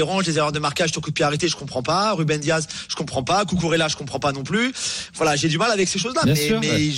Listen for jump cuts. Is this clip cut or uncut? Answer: uncut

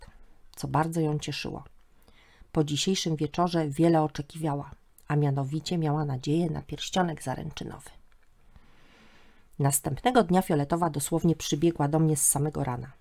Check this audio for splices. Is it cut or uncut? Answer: uncut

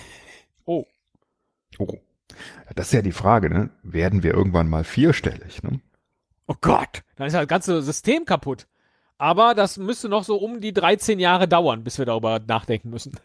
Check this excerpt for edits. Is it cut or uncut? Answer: uncut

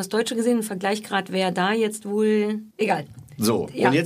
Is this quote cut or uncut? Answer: cut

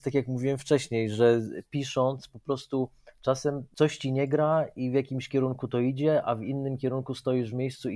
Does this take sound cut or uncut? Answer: uncut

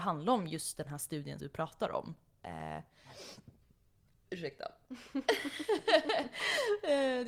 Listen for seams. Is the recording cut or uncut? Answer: cut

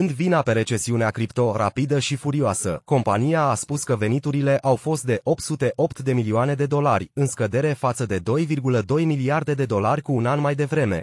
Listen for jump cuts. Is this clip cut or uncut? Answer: uncut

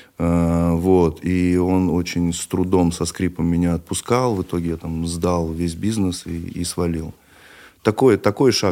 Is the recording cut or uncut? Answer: uncut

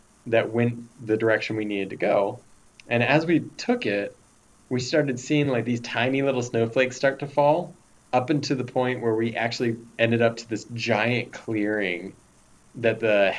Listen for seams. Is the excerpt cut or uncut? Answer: uncut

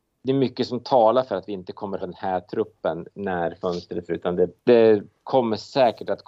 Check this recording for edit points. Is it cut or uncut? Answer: cut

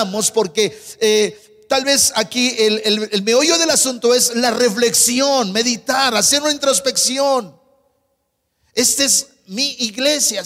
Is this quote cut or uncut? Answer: uncut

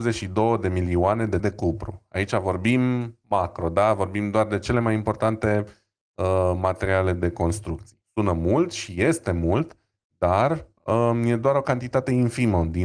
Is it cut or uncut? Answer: cut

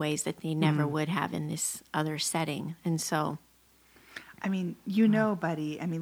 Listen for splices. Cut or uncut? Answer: uncut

